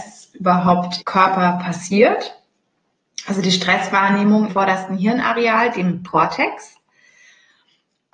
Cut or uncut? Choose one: cut